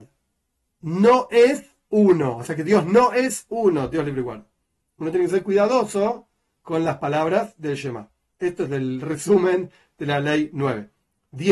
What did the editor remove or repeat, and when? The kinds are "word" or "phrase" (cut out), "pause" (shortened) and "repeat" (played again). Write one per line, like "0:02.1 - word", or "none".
none